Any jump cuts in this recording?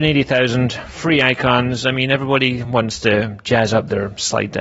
no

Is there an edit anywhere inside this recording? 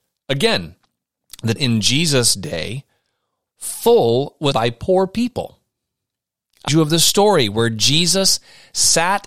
yes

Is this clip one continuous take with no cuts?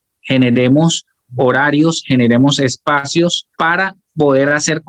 no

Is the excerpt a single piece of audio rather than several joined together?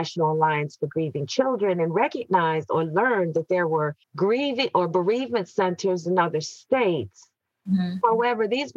no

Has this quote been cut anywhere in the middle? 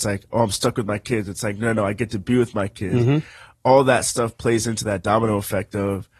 no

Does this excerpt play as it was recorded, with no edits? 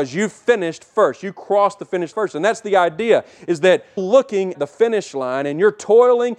no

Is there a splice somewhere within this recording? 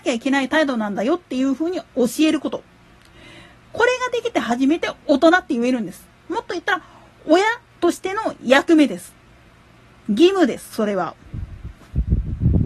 no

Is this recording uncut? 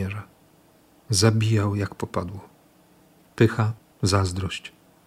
yes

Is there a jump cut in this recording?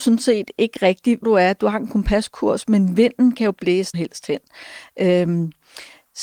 yes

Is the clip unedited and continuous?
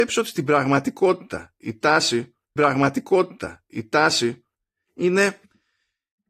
no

